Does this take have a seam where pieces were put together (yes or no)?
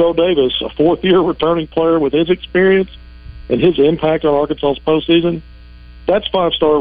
no